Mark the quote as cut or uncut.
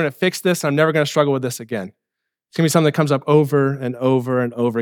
uncut